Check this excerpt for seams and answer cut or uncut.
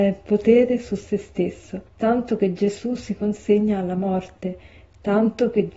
cut